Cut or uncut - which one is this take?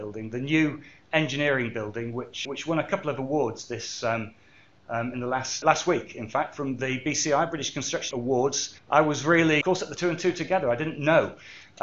cut